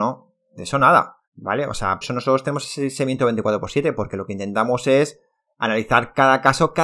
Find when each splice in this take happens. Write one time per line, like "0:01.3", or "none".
0:01.2
0:02.0